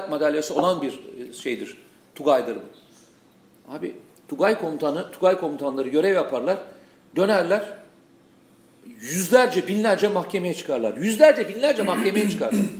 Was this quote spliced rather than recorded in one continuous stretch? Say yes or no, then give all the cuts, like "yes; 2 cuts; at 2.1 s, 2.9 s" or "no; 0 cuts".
no; 0 cuts